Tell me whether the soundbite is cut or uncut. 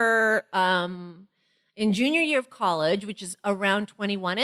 uncut